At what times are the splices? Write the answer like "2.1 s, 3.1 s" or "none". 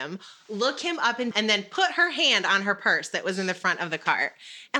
1.3 s

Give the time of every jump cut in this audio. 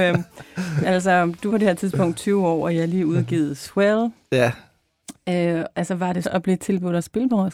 1.5 s, 6.2 s

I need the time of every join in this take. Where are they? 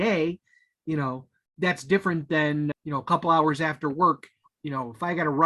2.7 s

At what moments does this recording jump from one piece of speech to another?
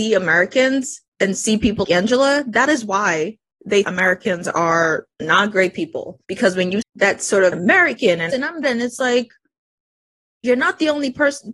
1.1 s, 1.8 s, 3.8 s, 5.1 s, 6.2 s, 6.8 s, 7.5 s, 8.3 s, 8.6 s

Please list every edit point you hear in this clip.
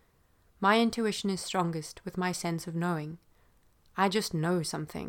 none

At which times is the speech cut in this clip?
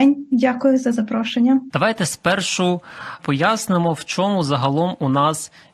3.2 s

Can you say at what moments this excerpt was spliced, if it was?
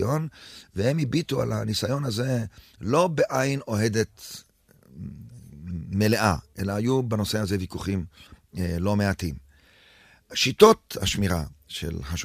none

